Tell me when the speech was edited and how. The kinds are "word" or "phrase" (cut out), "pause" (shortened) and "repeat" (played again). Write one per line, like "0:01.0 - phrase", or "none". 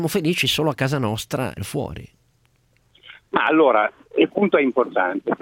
0:01.6 - phrase
0:04.3 - word